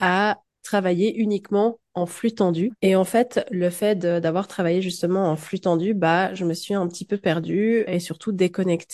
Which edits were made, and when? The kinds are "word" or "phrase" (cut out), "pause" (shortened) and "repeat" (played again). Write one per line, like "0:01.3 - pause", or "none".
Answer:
0:02.8 - pause
0:07.9 - word